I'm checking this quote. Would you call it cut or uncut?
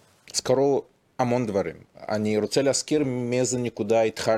uncut